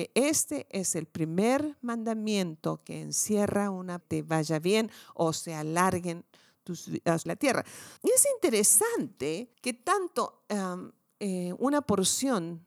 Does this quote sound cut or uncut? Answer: cut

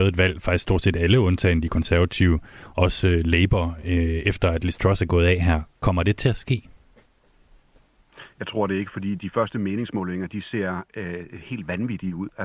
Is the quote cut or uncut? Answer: uncut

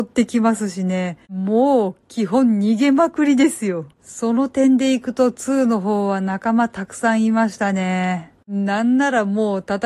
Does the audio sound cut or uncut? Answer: cut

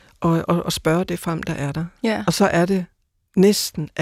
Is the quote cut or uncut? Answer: uncut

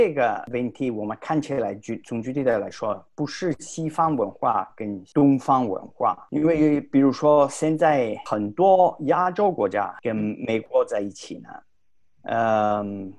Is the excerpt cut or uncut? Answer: uncut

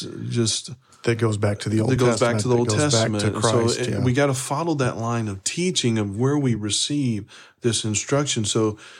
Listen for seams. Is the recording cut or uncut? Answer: uncut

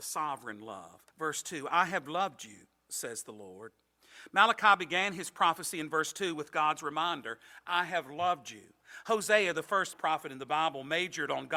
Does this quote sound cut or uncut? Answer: cut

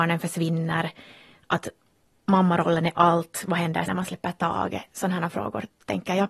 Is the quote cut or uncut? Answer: cut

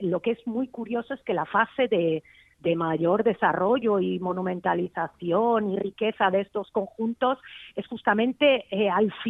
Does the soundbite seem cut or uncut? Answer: uncut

